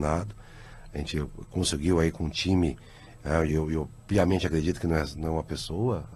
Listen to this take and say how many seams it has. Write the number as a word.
zero